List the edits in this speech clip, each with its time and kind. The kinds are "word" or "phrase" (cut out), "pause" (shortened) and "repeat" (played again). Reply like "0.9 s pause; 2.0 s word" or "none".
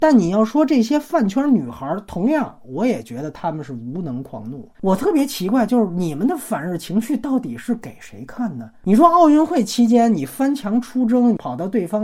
4.7 s pause